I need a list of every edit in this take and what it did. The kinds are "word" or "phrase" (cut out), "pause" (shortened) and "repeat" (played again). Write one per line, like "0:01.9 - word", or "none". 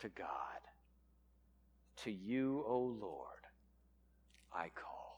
none